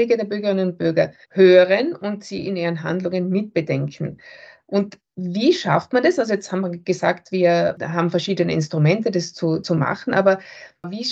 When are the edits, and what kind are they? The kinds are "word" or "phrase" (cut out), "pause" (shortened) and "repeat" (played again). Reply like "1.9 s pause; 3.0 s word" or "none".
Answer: 1.2 s pause; 5.1 s pause